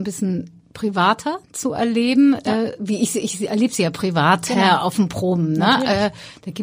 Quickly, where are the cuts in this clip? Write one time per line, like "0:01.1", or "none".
none

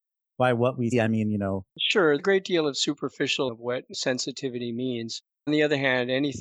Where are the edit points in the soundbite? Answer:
0:00.9
0:02.2
0:03.5
0:03.9
0:05.5

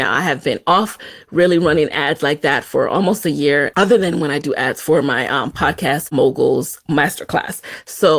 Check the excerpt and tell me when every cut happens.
none

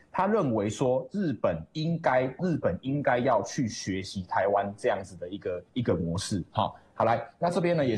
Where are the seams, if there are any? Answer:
0:02.4
0:05.7

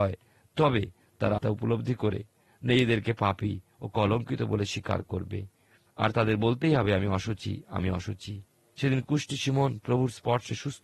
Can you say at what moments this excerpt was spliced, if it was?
0:01.4

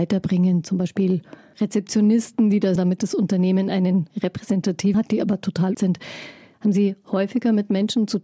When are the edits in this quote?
0:02.8
0:04.9
0:05.7

